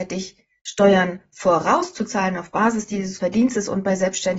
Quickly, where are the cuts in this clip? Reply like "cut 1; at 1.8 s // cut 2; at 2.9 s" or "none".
cut 1; at 3.2 s

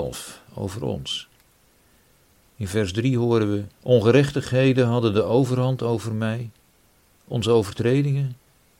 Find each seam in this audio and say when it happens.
cut 1; at 3.7 s

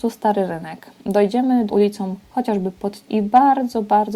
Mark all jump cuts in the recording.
cut 1; at 1.7 s // cut 2; at 3.1 s

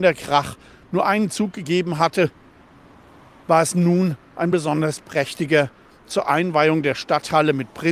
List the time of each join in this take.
none

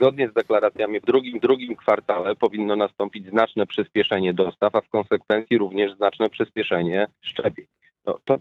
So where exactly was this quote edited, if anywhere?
cut 1; at 1.0 s // cut 2; at 1.4 s // cut 3; at 7.2 s

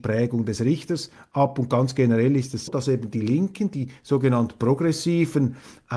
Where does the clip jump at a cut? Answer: cut 1; at 2.7 s

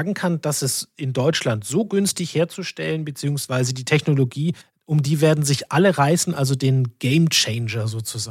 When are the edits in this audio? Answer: cut 1; at 4.6 s

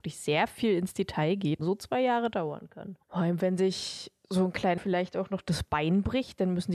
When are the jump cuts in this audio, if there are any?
cut 1; at 1.6 s // cut 2; at 3.0 s // cut 3; at 4.8 s

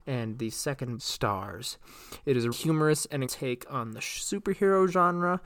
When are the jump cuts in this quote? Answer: cut 1; at 1.0 s // cut 2; at 2.5 s // cut 3; at 3.3 s

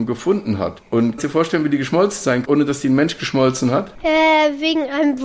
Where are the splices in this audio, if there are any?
cut 1; at 1.2 s // cut 2; at 2.4 s

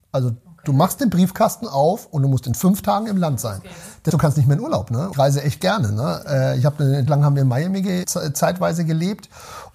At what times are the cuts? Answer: cut 1; at 4.1 s // cut 2; at 5.1 s // cut 3; at 7.1 s // cut 4; at 8.0 s

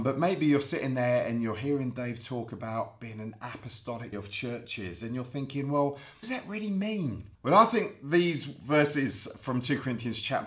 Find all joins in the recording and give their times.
cut 1; at 4.1 s // cut 2; at 6.2 s // cut 3; at 7.3 s

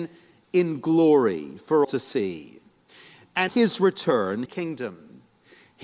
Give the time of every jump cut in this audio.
cut 1; at 1.8 s // cut 2; at 3.5 s // cut 3; at 4.5 s

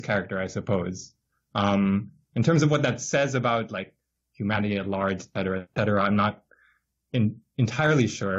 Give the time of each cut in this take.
none

